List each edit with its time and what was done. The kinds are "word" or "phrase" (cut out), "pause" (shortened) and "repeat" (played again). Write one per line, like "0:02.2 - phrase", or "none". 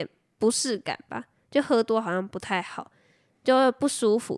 none